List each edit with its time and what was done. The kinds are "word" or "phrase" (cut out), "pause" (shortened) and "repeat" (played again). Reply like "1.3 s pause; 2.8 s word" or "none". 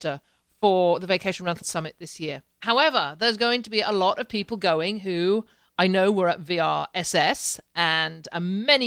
1.6 s word; 2.5 s pause

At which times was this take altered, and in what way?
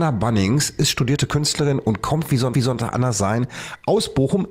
2.5 s repeat

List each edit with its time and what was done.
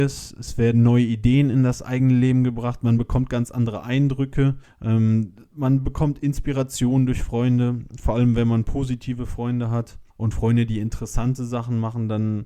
4.6 s pause; 10.1 s pause

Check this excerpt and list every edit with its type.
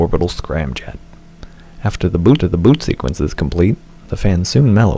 2.4 s repeat

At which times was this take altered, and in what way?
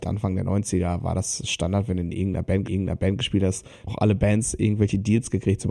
2.6 s repeat; 3.9 s phrase

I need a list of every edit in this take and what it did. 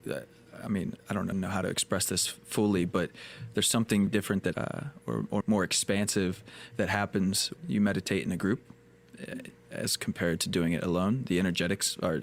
1.0 s word; 1.3 s word; 4.1 s word; 4.5 s word; 5.4 s word; 7.6 s word

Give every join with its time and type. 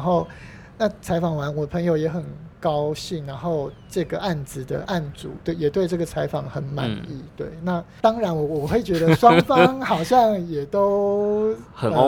2.5 s pause

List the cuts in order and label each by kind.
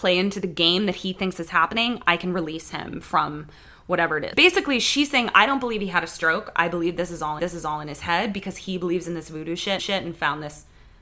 4.3 s word; 7.4 s repeat; 9.8 s repeat

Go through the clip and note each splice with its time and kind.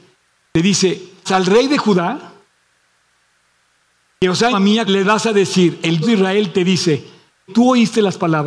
1.3 s word; 4.5 s word; 4.9 s word; 6.0 s word; 7.5 s word

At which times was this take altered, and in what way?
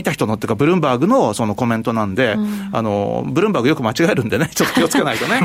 none

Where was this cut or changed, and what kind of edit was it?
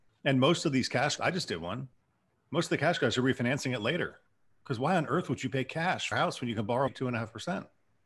1.2 s word; 6.1 s word; 6.9 s word

